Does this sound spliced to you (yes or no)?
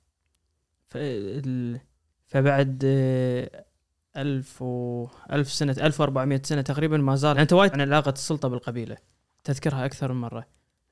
yes